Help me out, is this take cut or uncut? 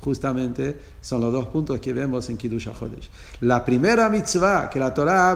uncut